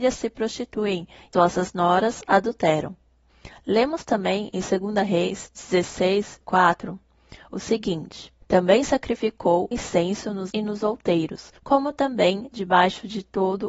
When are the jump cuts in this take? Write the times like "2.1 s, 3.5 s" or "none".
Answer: 1.3 s, 6.4 s, 8.4 s, 9.7 s, 10.5 s, 11.6 s